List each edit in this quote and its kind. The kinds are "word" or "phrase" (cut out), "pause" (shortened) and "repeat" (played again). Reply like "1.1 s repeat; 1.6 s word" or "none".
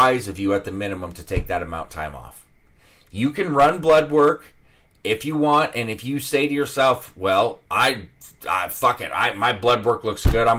none

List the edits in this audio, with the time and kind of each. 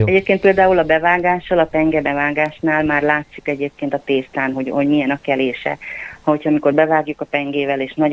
none

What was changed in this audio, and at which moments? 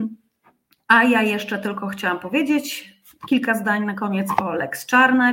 none

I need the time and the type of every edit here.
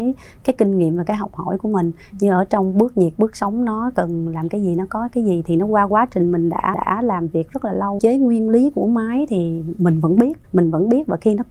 6.7 s repeat; 8.0 s phrase; 10.4 s pause

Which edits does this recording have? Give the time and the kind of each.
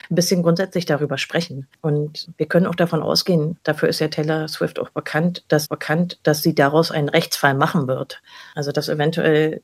3.6 s word; 5.6 s repeat

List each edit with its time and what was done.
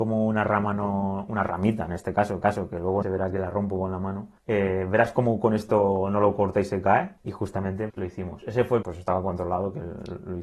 2.4 s repeat; 3.0 s phrase; 4.4 s pause; 7.2 s pause; 7.9 s word; 8.8 s phrase

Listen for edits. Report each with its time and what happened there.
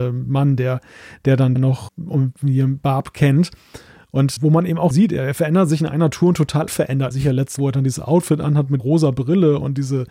1.6 s word; 1.9 s word; 4.4 s word; 4.9 s word; 6.7 s word; 7.1 s word; 7.6 s word; 8.8 s word

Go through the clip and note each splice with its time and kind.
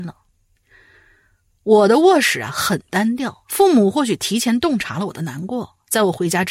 3.4 s pause

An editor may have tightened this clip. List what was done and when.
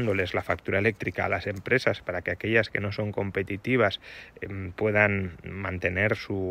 none

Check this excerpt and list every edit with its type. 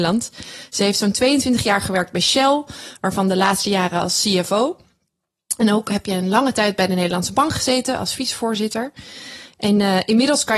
none

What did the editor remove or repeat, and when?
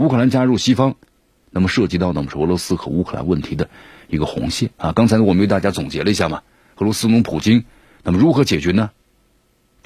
4.7 s pause

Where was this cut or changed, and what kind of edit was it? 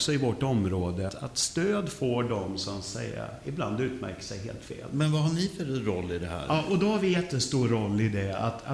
1.1 s word

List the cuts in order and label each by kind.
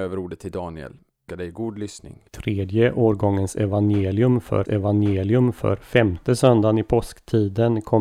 1.3 s word; 2.3 s pause; 4.7 s repeat

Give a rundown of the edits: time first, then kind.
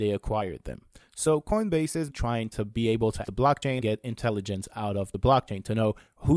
2.1 s word; 3.2 s word; 3.8 s word

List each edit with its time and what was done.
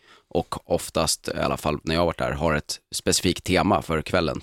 none

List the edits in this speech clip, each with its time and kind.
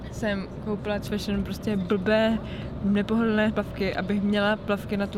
1.0 s phrase; 3.5 s word

